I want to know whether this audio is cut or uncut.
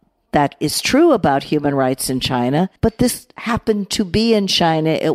cut